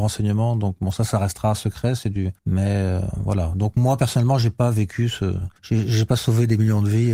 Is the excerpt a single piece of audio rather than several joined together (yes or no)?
no